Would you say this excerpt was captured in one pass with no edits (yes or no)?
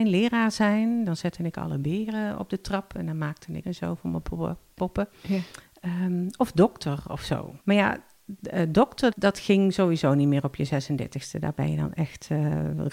no